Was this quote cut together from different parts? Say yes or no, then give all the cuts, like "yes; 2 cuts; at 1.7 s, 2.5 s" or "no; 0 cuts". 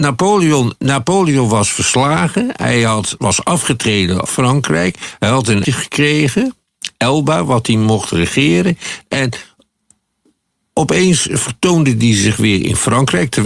yes; 2 cuts; at 4.3 s, 5.6 s